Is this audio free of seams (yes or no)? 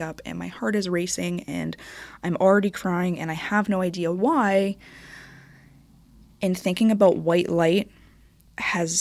yes